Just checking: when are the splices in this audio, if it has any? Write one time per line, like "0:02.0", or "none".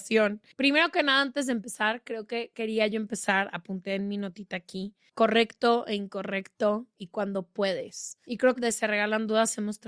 0:08.6